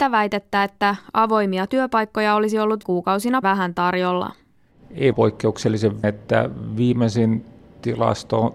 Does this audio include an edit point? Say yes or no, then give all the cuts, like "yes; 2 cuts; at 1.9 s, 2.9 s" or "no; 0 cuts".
yes; 4 cuts; at 2.8 s, 3.4 s, 5.1 s, 6.0 s